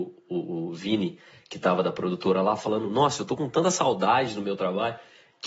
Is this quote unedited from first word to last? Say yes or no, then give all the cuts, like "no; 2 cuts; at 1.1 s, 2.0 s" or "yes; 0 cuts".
yes; 0 cuts